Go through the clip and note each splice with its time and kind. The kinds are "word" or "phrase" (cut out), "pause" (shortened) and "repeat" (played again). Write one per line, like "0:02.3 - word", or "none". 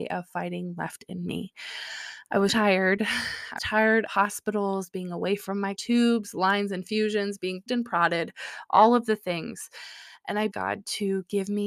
0:02.5 - word
0:03.6 - word
0:04.1 - word
0:05.8 - word
0:07.7 - word
0:10.5 - word